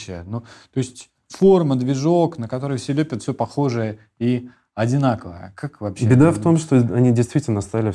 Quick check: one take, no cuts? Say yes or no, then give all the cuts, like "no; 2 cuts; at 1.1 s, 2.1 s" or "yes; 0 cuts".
yes; 0 cuts